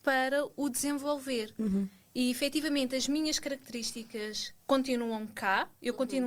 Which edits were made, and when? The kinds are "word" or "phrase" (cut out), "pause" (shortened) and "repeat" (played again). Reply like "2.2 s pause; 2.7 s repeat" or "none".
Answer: none